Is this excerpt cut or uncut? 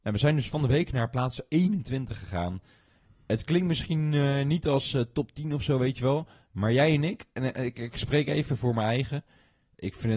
uncut